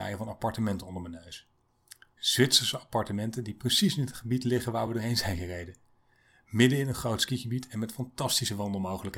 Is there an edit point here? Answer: no; 0 cuts

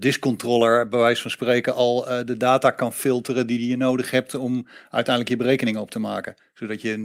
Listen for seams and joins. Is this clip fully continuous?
yes; 0 cuts

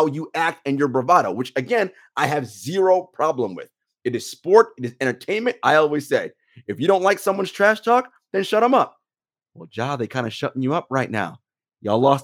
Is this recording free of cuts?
yes; 0 cuts

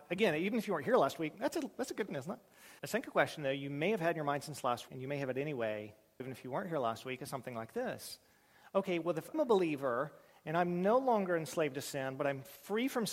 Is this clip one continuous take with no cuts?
no; 5 cuts; at 2.1 s, 2.8 s, 4.9 s, 6.2 s, 9.3 s

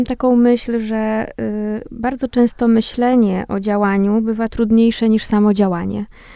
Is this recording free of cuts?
yes; 0 cuts

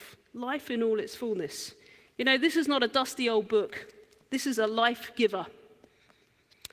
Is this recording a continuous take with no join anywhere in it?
yes; 0 cuts

